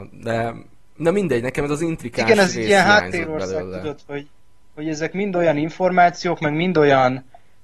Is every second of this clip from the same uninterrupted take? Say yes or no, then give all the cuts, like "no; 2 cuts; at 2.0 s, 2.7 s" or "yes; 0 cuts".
yes; 0 cuts